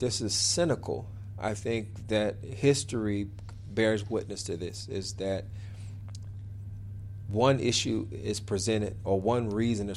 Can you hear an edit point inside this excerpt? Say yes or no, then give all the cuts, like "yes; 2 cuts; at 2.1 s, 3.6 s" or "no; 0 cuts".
no; 0 cuts